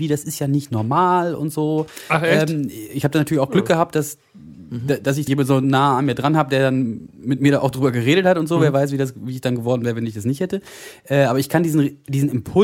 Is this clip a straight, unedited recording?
no; 1 cut; at 5.3 s

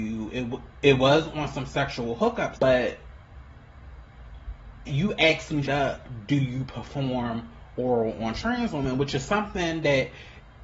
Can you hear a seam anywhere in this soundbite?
yes; 4 cuts; at 2.6 s, 4.9 s, 5.7 s, 6.3 s

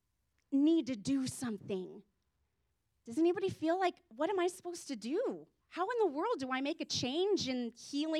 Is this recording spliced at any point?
no; 0 cuts

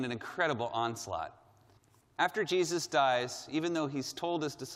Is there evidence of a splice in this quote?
no; 0 cuts

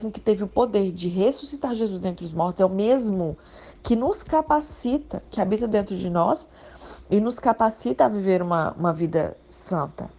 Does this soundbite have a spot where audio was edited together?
no; 0 cuts

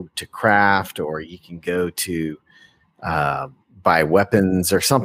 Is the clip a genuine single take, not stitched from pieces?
yes; 0 cuts

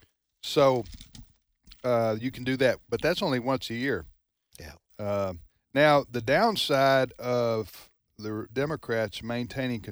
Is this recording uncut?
yes; 0 cuts

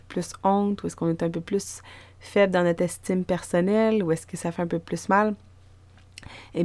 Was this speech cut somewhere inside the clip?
no; 0 cuts

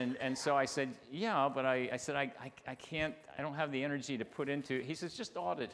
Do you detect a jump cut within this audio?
no; 0 cuts

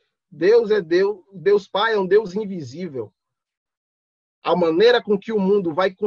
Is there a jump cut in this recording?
no; 0 cuts

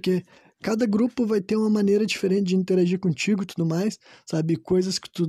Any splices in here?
no; 0 cuts

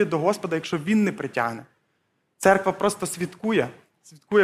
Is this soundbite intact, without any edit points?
yes; 0 cuts

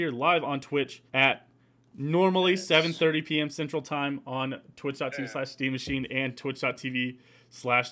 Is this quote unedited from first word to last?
no; 1 cut; at 1.1 s

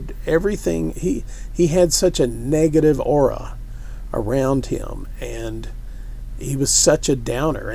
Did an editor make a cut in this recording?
no; 0 cuts

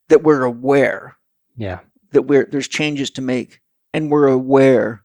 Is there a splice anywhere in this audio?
no; 0 cuts

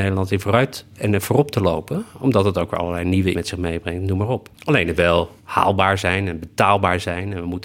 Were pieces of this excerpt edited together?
yes; 4 cuts; at 3.3 s, 4.5 s, 5.0 s, 5.4 s

